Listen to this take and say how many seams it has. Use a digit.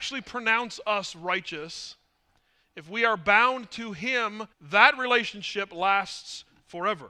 1